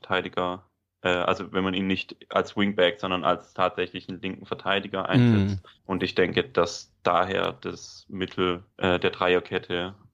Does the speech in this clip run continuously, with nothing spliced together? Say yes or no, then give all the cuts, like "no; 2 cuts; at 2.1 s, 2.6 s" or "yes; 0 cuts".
no; 2 cuts; at 5.8 s, 8.7 s